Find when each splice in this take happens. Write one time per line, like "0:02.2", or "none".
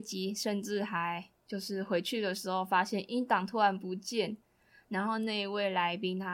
none